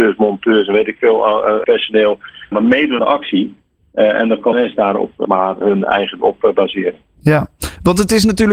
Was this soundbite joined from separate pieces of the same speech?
yes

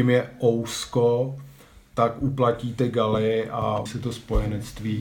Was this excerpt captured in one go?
no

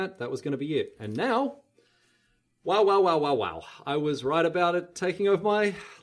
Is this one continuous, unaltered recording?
yes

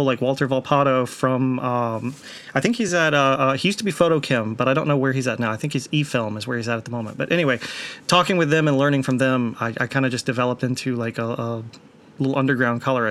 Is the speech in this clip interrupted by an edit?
no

